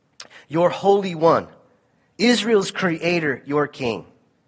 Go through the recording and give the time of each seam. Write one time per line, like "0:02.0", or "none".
none